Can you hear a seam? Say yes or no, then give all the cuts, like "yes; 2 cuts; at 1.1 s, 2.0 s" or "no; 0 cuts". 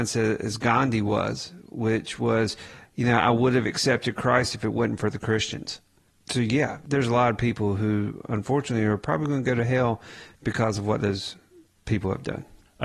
no; 0 cuts